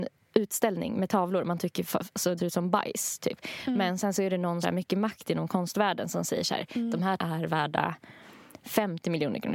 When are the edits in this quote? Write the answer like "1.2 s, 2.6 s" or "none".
2.4 s, 4.6 s, 7.2 s